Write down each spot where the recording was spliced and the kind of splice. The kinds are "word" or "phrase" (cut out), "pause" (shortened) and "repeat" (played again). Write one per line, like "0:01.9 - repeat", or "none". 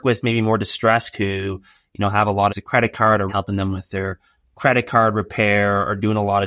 0:01.1 - word
0:02.5 - phrase
0:03.3 - word